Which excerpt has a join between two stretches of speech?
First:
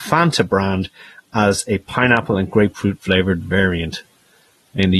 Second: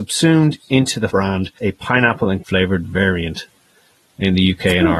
second; 3 cuts; at 1.1 s, 1.6 s, 2.4 s

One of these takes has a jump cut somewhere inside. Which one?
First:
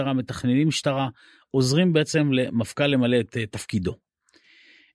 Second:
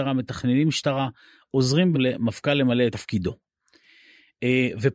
second; 2 cuts; at 1.9 s, 2.9 s

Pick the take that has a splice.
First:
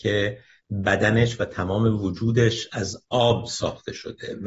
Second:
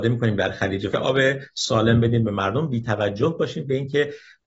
second; 1 cut; at 0.9 s

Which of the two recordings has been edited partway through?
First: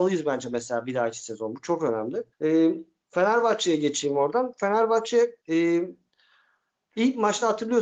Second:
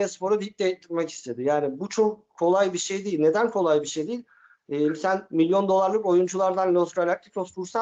first; 2 cuts; at 2.3 s, 5.4 s

